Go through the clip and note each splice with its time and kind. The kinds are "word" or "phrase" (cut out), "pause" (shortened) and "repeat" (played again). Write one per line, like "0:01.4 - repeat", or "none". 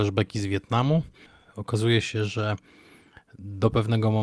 none